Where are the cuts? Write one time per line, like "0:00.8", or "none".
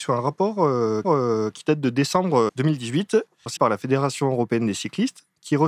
0:01.0
0:03.6